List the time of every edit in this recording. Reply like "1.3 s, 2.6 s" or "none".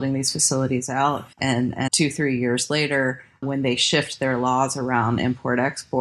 1.3 s, 1.9 s